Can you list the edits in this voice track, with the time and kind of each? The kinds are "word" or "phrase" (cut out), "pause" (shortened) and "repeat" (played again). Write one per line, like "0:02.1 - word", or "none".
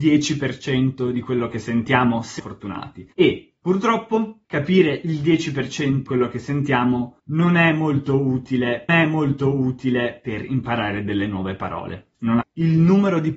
0:02.4 - word
0:03.1 - pause
0:04.4 - pause
0:06.1 - word
0:07.2 - pause
0:08.9 - repeat
0:12.4 - phrase